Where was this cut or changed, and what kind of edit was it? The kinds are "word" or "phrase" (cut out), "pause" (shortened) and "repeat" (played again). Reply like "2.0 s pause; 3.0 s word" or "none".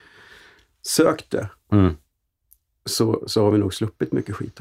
none